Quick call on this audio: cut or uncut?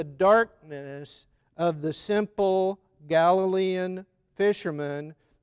uncut